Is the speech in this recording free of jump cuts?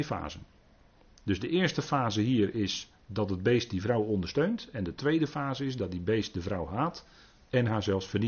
yes; 0 cuts

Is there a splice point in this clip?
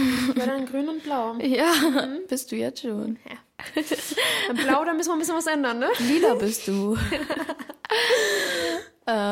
no; 0 cuts

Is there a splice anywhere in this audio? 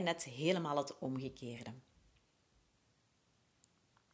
no; 0 cuts

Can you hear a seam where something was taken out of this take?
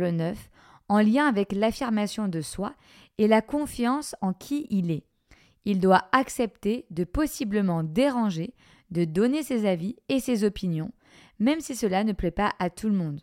no; 0 cuts

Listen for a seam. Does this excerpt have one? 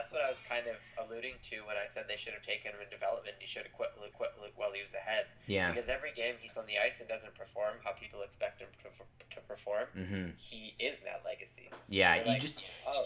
yes; 3 cuts; at 4.1 s, 6.5 s, 11.0 s

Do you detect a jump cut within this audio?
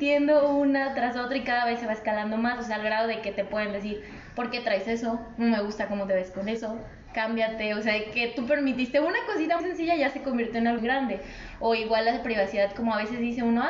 yes; 2 cuts; at 9.6 s, 10.8 s

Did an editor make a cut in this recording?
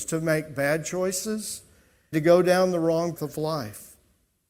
yes; 2 cuts; at 2.1 s, 3.2 s

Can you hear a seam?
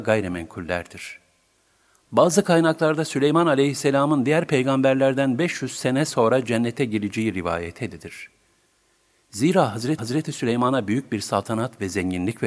yes; 1 cut; at 10.0 s

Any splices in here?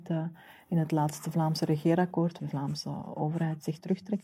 yes; 1 cut; at 2.4 s

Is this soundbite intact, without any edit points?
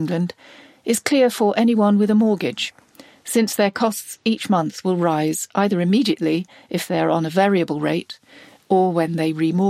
yes; 0 cuts

